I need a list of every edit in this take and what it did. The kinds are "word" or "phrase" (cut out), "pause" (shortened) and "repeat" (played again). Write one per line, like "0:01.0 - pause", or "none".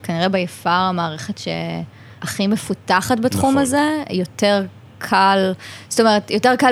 0:02.2 - pause